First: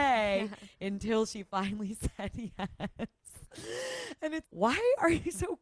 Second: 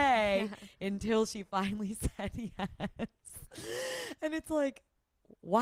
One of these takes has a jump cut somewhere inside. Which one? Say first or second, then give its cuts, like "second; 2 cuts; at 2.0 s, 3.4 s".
first; 1 cut; at 4.4 s